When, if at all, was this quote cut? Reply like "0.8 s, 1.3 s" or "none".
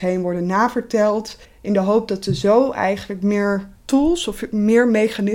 1.4 s, 3.8 s